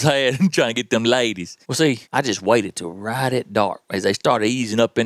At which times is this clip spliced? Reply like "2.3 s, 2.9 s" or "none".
1.6 s, 2.0 s